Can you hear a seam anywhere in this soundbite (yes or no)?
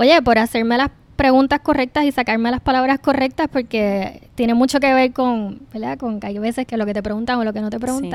yes